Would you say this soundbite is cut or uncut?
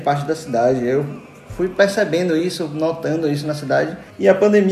uncut